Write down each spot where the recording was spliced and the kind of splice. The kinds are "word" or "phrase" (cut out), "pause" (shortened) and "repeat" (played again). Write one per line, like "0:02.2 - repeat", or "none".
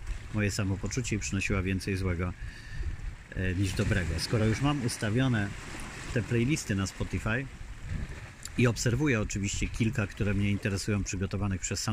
none